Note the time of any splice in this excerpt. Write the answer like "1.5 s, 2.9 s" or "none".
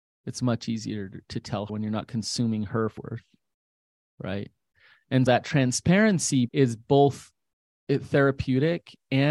1.7 s, 3.0 s, 5.3 s, 6.5 s